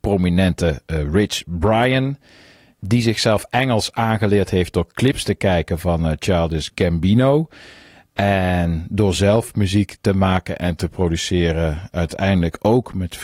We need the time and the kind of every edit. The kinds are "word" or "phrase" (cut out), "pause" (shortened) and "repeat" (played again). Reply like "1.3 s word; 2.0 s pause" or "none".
none